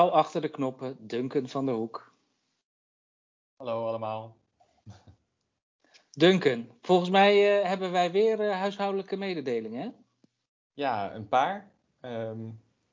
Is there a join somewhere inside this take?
no; 0 cuts

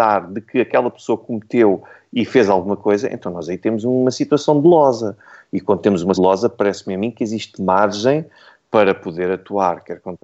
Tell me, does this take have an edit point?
yes; 1 cut; at 6.1 s

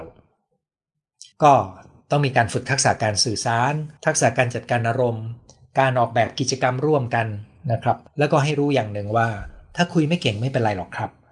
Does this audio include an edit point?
yes; 3 cuts; at 1.3 s, 4.0 s, 8.1 s

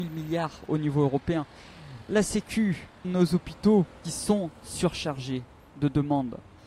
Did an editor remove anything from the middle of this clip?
yes; 2 cuts; at 3.0 s, 4.0 s

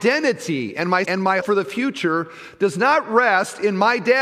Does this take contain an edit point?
yes; 2 cuts; at 1.0 s, 1.4 s

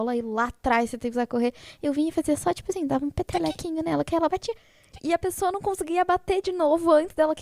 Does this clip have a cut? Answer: no; 0 cuts

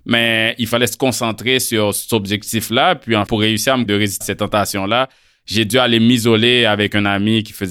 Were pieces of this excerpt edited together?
yes; 3 cuts; at 3.3 s, 3.9 s, 4.2 s

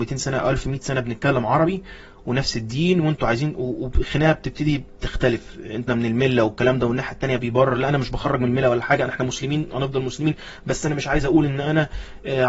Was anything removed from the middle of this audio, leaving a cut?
yes; 2 cuts; at 5.9 s, 7.4 s

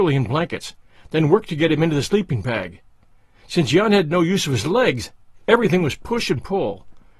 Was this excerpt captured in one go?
yes; 0 cuts

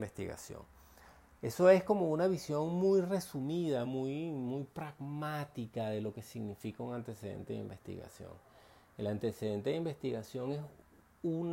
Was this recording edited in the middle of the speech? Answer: no; 0 cuts

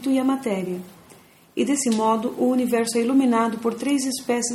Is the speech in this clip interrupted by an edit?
no; 0 cuts

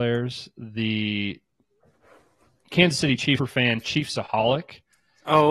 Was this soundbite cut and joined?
yes; 1 cut; at 3.4 s

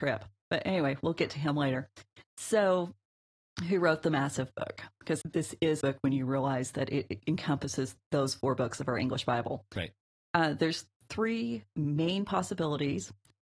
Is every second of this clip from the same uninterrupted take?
no; 2 cuts; at 5.2 s, 5.8 s

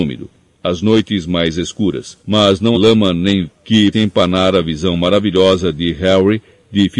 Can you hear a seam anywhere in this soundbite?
yes; 4 cuts; at 2.2 s, 2.7 s, 3.5 s, 3.9 s

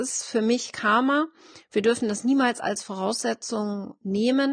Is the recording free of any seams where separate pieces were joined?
yes; 0 cuts

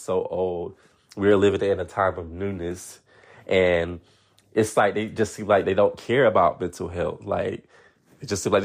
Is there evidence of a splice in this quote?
no; 0 cuts

